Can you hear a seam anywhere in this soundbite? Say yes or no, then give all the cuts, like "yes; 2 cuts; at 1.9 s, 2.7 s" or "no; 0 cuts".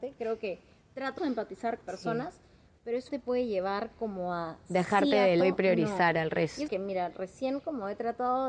yes; 5 cuts; at 1.2 s, 1.8 s, 3.1 s, 5.4 s, 6.7 s